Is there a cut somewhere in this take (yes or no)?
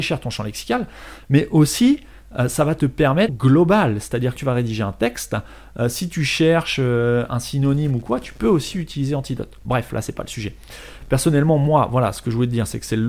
yes